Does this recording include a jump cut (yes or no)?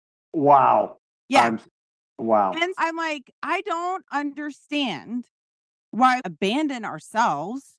yes